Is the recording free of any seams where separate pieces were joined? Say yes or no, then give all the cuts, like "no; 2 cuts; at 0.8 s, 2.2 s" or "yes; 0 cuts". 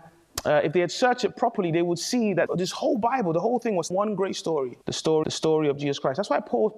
no; 4 cuts; at 2.5 s, 3.9 s, 4.8 s, 5.2 s